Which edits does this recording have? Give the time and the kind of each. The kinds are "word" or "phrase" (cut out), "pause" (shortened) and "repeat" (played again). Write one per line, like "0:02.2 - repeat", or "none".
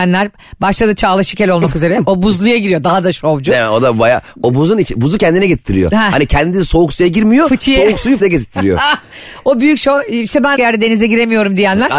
0:08.2 - word
0:10.6 - phrase